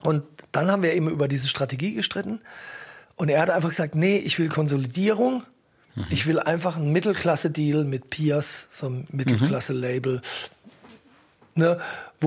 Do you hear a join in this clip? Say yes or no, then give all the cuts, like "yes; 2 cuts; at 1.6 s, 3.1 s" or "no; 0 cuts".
no; 0 cuts